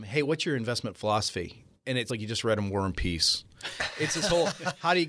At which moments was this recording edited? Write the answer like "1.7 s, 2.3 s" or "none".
2.1 s

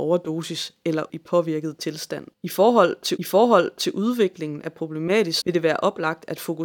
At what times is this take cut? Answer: 1.1 s, 2.3 s, 3.2 s, 5.4 s

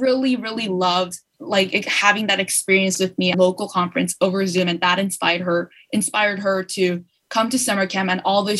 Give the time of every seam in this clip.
1.3 s, 3.3 s

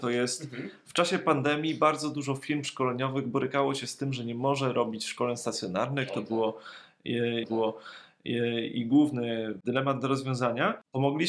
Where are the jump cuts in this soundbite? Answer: 7.4 s

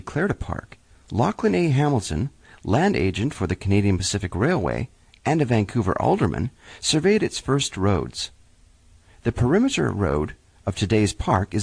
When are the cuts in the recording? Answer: none

